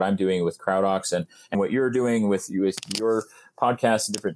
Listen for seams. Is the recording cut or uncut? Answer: cut